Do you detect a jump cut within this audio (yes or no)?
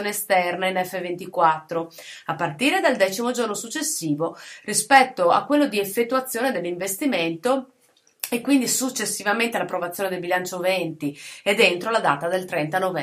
no